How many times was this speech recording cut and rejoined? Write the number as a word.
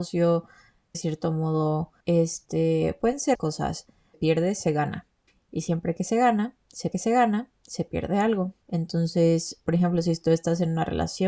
seven